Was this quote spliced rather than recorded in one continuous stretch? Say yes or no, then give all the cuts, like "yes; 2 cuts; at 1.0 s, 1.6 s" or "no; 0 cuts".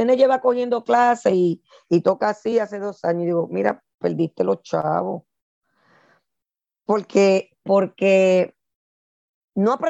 no; 0 cuts